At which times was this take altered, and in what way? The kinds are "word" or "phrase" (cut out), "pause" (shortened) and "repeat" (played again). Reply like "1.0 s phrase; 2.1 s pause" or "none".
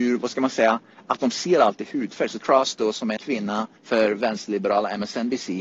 2.4 s word; 3.2 s phrase; 3.8 s pause